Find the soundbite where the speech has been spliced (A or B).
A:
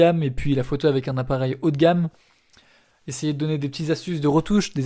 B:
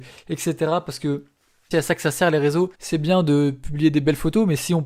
B